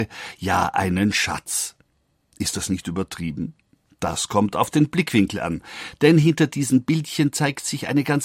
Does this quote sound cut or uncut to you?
uncut